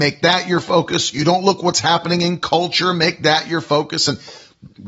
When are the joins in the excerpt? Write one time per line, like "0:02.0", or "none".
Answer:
none